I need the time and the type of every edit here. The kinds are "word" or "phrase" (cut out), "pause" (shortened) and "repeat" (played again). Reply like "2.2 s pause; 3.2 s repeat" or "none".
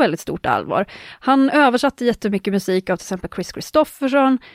none